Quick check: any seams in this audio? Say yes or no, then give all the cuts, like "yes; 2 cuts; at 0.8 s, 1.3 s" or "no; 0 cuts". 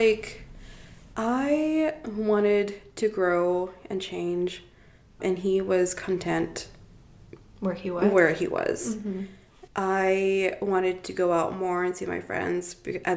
no; 0 cuts